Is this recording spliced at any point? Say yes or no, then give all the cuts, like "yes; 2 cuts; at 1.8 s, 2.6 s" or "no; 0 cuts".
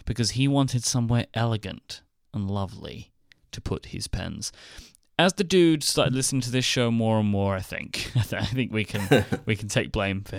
no; 0 cuts